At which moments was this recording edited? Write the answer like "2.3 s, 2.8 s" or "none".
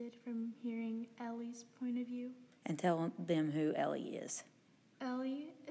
none